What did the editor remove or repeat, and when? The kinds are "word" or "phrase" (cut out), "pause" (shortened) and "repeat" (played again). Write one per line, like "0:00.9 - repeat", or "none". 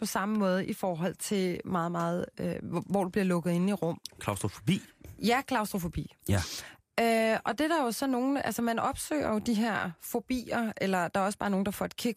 none

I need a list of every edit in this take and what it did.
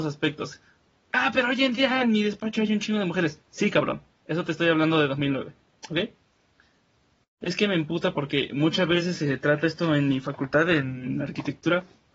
0:03.4 - pause

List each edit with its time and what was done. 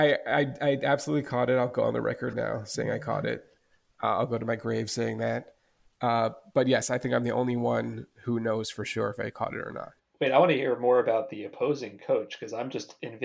none

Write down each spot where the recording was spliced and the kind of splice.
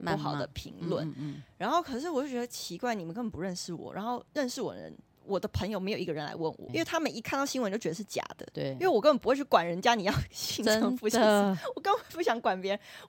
0:04.3 - pause
0:05.1 - pause
0:06.7 - word

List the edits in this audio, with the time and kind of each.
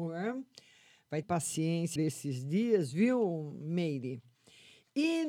0:01.2 - phrase
0:02.0 - phrase

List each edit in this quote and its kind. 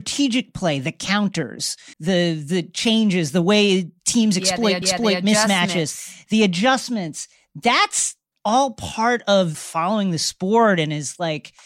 0:01.9 - pause
0:04.8 - repeat
0:08.3 - pause
0:09.5 - phrase

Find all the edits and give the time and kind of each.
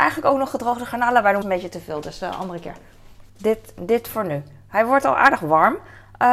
0:01.4 - phrase
0:03.3 - pause

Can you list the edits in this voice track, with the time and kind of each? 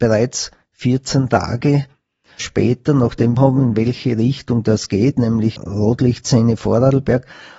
0:02.4 - word
0:03.4 - phrase

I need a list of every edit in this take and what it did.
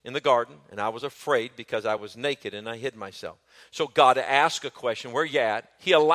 none

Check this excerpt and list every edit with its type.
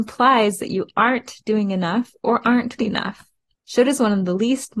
0:02.8 - word

